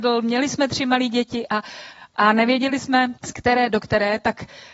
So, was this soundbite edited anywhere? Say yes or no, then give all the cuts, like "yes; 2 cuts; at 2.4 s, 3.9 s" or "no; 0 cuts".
yes; 1 cut; at 3.2 s